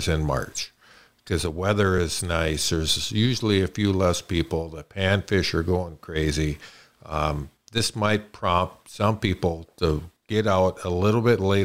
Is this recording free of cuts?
yes; 0 cuts

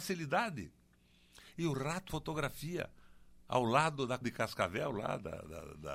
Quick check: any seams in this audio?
yes; 2 cuts; at 2.1 s, 4.2 s

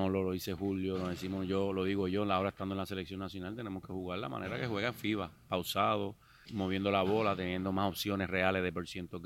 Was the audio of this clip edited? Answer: yes; 1 cut; at 6.5 s

